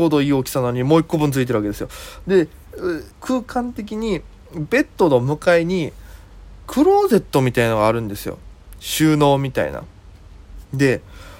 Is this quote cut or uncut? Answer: cut